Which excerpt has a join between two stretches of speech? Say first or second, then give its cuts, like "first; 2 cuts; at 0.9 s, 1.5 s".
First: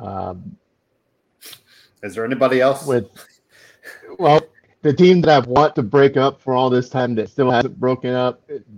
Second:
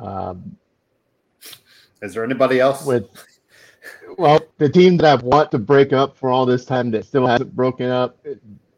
second; 1 cut; at 4.5 s